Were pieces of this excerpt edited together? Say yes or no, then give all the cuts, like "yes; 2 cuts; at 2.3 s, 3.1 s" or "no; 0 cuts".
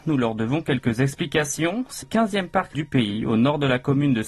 yes; 2 cuts; at 2.0 s, 2.7 s